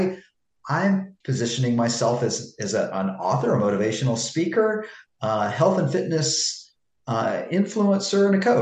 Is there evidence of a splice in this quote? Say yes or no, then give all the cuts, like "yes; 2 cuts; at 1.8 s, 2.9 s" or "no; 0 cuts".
yes; 1 cut; at 1.2 s